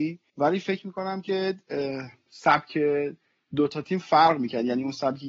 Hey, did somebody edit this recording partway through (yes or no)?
no